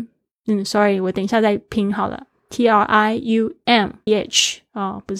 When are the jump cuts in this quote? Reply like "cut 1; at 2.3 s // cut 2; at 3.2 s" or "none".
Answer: cut 1; at 4.1 s